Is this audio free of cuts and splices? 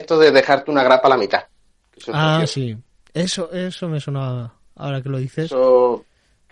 yes; 0 cuts

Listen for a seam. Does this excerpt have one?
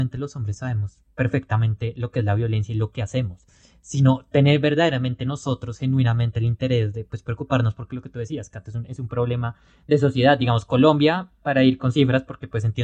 no; 0 cuts

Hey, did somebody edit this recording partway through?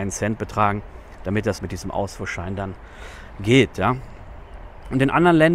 yes; 1 cut; at 1.6 s

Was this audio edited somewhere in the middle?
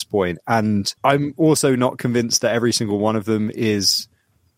yes; 1 cut; at 1.0 s

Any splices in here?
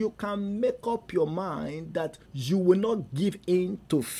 yes; 1 cut; at 2.2 s

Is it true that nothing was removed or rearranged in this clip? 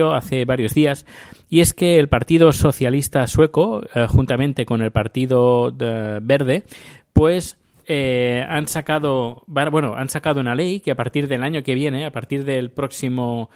yes; 0 cuts

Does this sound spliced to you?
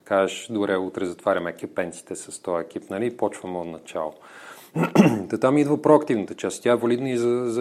no; 0 cuts

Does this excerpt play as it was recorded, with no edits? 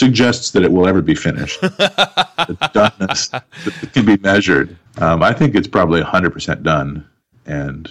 no; 1 cut; at 4.9 s

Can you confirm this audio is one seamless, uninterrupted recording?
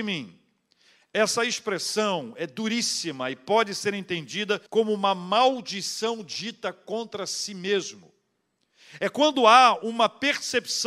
no; 1 cut; at 4.7 s

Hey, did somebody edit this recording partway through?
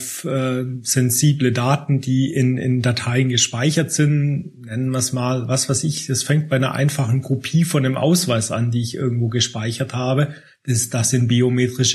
no; 0 cuts

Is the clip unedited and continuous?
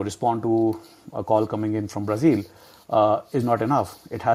yes; 0 cuts

